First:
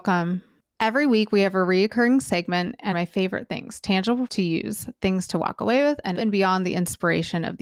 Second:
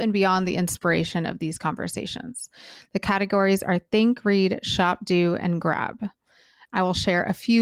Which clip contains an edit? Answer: first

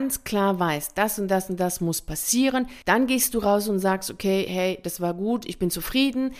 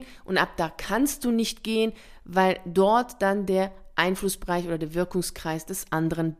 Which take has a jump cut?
first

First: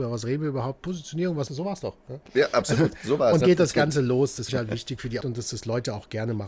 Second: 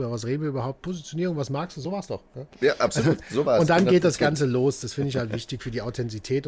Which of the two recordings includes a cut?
first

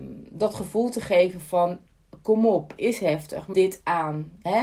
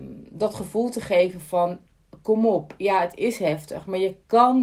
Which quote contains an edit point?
first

